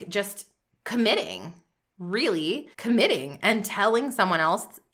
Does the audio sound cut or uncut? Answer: cut